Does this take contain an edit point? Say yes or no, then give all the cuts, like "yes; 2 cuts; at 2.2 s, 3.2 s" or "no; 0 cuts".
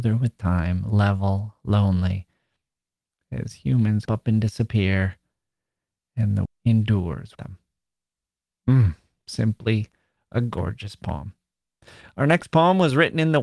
yes; 3 cuts; at 4.1 s, 6.5 s, 7.3 s